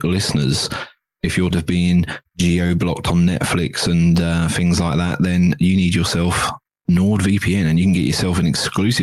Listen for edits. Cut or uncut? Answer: cut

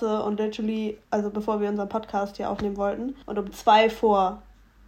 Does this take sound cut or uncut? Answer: cut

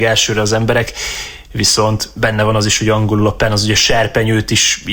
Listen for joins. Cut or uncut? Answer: uncut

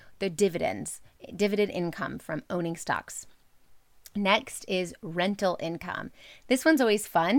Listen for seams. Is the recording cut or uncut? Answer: uncut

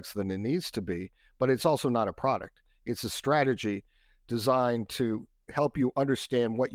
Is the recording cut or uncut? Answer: uncut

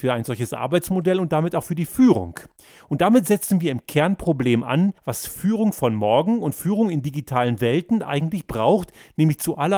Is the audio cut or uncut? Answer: cut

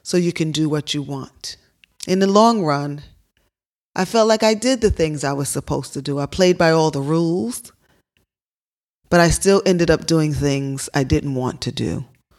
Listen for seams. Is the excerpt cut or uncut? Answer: uncut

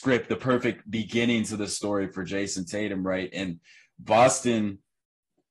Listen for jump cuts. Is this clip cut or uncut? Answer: uncut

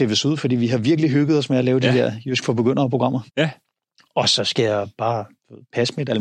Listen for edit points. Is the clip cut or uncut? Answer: cut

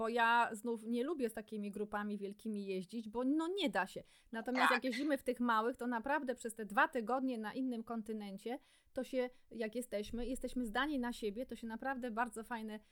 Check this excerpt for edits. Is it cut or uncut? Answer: uncut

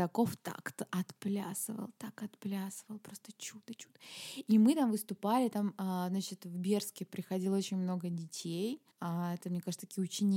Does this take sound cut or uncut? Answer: cut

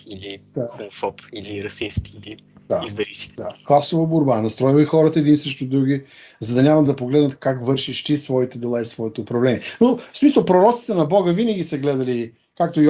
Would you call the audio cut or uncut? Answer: cut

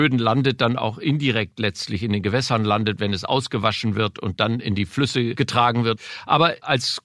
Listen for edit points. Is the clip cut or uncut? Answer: uncut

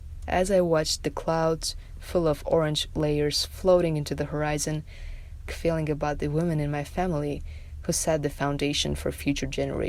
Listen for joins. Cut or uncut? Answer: cut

